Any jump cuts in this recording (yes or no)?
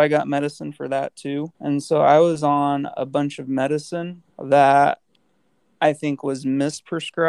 yes